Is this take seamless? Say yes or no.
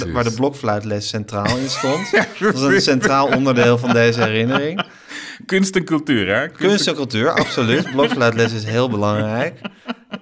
yes